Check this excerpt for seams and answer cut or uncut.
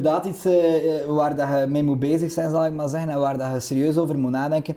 uncut